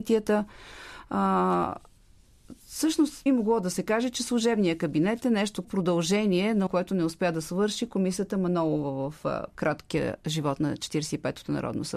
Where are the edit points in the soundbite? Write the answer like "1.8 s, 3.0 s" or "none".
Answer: 3.3 s, 5.6 s, 6.7 s